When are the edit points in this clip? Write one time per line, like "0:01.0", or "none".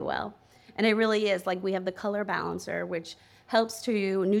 none